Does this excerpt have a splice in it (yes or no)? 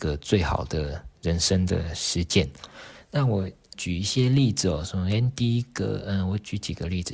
yes